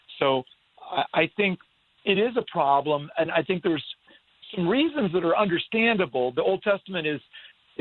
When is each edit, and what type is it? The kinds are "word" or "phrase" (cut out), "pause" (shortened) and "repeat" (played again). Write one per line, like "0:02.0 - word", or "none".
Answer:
none